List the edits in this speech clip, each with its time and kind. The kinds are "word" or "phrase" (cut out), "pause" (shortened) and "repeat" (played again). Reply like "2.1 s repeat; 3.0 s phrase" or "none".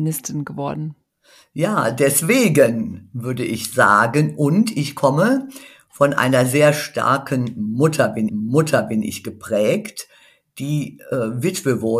8.3 s repeat